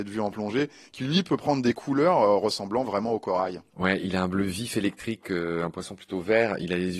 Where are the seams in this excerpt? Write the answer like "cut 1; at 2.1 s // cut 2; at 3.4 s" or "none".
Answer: none